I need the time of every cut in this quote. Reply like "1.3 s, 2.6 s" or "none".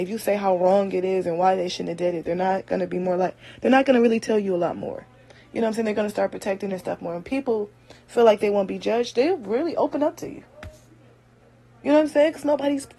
none